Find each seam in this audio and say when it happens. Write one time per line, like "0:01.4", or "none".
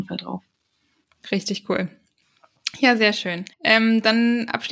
0:03.5